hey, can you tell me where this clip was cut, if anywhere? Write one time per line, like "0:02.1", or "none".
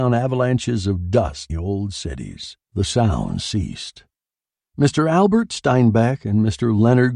0:01.5
0:02.6